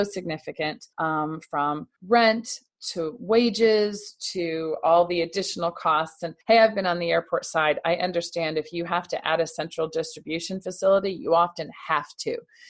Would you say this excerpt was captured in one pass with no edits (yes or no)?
no